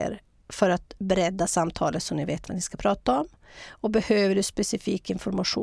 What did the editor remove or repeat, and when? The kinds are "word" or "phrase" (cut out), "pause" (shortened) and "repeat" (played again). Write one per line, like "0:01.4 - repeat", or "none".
none

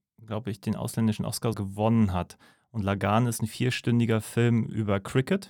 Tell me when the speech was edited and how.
0:01.5 - word

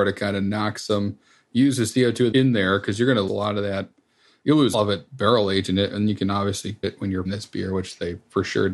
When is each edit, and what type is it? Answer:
0:02.3 - word
0:03.3 - word
0:04.7 - word
0:06.8 - word
0:07.3 - word

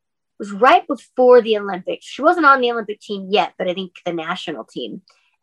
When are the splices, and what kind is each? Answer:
none

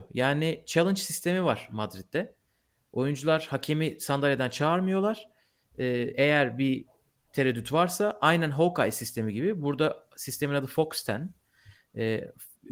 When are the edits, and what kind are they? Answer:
none

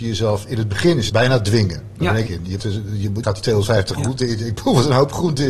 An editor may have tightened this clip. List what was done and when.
0:01.1 - word
0:02.3 - word
0:02.6 - word
0:03.2 - word
0:04.0 - word

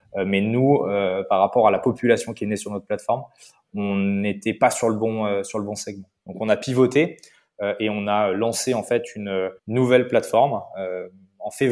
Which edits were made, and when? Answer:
0:09.6 - pause

